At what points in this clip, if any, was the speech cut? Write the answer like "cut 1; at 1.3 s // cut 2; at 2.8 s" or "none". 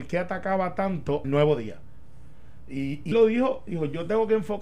cut 1; at 1.2 s // cut 2; at 3.1 s